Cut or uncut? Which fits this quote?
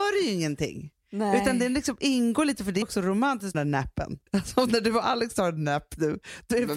cut